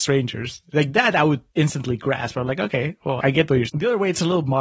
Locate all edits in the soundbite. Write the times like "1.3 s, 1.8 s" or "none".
1.5 s, 3.2 s, 3.7 s